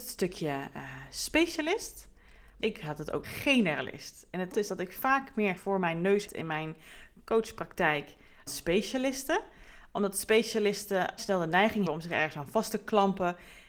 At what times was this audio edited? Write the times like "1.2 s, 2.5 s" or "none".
2.6 s, 3.2 s, 4.5 s, 5.6 s, 6.3 s, 8.5 s, 11.2 s, 11.9 s